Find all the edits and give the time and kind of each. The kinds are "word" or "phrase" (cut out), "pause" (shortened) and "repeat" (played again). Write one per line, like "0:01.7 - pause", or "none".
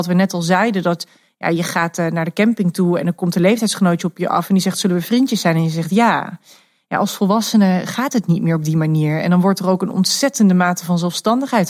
none